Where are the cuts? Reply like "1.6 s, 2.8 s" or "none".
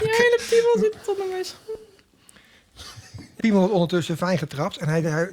1.0 s, 3.4 s